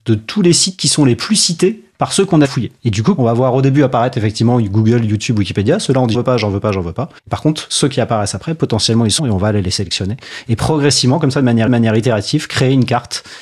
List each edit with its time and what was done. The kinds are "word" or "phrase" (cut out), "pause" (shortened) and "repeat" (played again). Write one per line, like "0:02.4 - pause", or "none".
0:02.4 - word
0:02.8 - pause
0:03.2 - phrase
0:06.1 - word
0:07.2 - pause
0:09.2 - word
0:11.7 - repeat